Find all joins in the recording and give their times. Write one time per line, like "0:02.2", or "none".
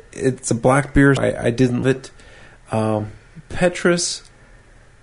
0:01.2
0:01.8
0:03.4